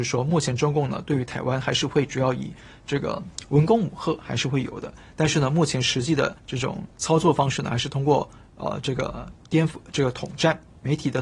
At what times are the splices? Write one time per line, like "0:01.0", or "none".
0:06.4
0:06.9